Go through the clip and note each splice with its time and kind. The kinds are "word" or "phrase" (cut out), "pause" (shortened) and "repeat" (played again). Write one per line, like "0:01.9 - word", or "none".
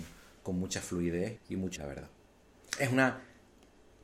0:01.4 - word
0:01.8 - word